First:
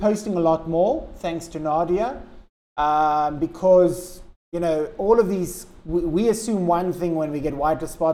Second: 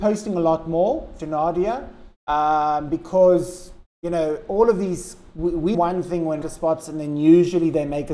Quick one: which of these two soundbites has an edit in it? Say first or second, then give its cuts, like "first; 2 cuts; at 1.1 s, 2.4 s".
second; 4 cuts; at 1.2 s, 2.2 s, 5.7 s, 6.4 s